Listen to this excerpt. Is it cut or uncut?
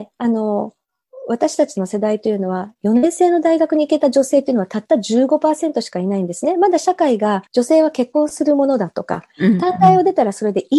cut